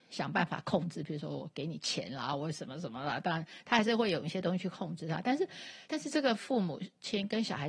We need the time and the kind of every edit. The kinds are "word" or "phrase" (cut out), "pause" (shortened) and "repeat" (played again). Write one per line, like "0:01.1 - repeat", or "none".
0:05.9 - pause